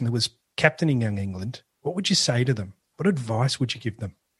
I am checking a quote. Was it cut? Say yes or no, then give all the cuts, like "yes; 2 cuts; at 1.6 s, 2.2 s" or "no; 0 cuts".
no; 0 cuts